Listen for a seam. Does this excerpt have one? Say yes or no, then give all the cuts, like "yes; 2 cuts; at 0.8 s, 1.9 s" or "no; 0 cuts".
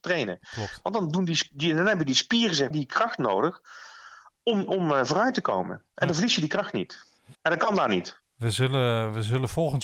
yes; 2 cuts; at 2.7 s, 7.3 s